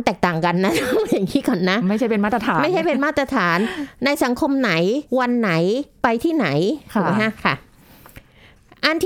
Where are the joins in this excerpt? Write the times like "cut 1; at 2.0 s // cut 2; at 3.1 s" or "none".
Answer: cut 1; at 5.1 s